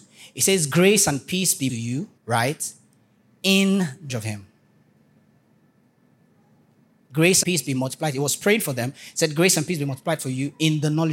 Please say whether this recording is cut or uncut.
cut